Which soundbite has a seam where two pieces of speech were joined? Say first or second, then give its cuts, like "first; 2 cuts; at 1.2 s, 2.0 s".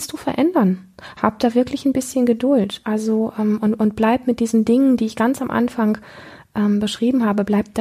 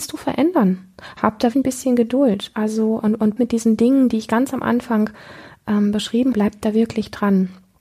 second; 4 cuts; at 1.5 s, 3.0 s, 3.4 s, 6.3 s